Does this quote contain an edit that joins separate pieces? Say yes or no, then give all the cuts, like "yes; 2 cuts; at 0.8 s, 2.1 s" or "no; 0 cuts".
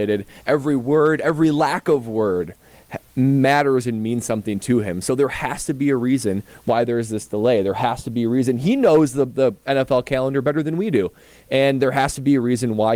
no; 0 cuts